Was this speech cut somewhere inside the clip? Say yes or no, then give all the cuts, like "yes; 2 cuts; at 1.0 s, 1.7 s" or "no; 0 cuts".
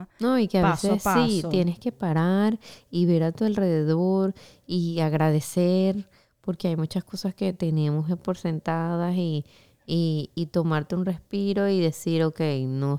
no; 0 cuts